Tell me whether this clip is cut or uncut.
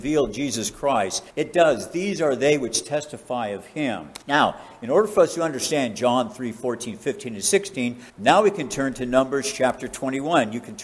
cut